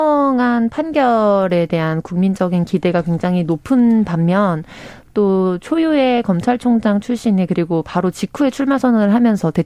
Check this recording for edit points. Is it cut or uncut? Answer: uncut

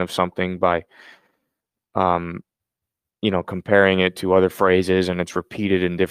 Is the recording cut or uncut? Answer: uncut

